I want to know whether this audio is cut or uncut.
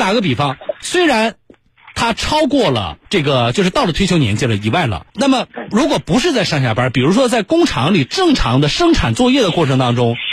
cut